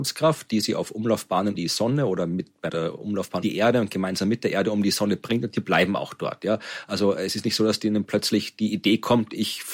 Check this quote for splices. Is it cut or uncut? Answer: cut